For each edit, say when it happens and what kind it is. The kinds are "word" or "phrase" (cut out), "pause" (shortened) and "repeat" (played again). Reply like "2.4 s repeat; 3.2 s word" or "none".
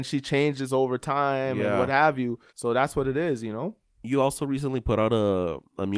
2.5 s pause